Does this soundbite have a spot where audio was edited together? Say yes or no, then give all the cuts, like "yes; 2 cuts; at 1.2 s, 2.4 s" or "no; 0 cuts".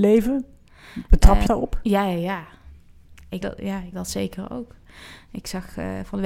yes; 3 cuts; at 1.5 s, 3.4 s, 3.9 s